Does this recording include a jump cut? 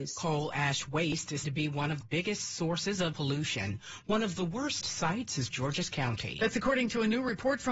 yes; 5 cuts; at 1.4 s, 2.0 s, 3.1 s, 4.8 s, 5.5 s

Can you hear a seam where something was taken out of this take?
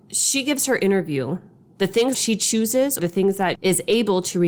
yes; 3 cuts; at 2.1 s, 3.0 s, 3.5 s

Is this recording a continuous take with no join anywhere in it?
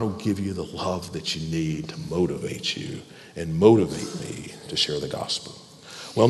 yes; 0 cuts

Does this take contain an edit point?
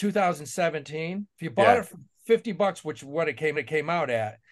yes; 2 cuts; at 1.3 s, 3.6 s

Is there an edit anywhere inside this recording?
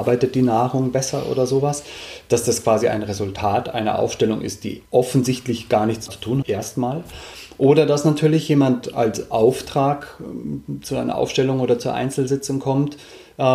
yes; 3 cuts; at 4.8 s, 6.1 s, 6.4 s

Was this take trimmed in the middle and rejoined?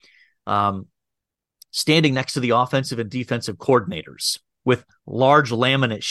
no; 0 cuts

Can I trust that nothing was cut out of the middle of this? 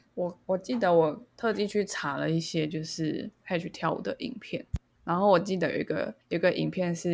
yes; 0 cuts

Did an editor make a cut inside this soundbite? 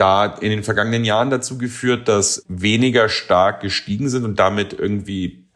yes; 1 cut; at 2.4 s

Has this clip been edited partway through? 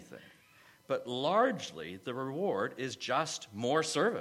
no; 0 cuts

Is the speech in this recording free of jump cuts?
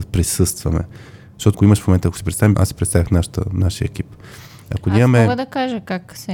no; 2 cuts; at 1.5 s, 2.5 s

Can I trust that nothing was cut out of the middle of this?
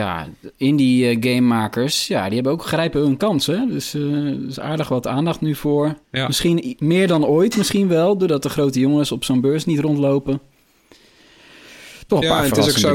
no; 1 cut; at 6.0 s

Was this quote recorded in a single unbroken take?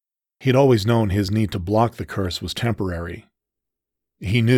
yes; 0 cuts

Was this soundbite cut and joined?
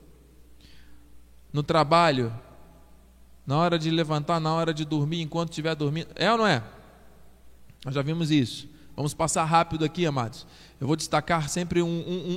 no; 0 cuts

